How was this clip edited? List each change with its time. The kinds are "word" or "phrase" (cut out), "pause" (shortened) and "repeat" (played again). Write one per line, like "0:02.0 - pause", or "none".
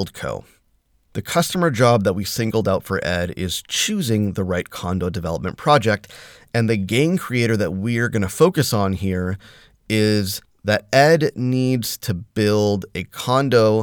none